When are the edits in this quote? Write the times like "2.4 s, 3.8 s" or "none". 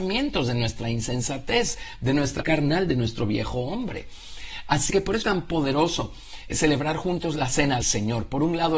2.4 s, 4.9 s, 5.2 s, 6.5 s, 7.8 s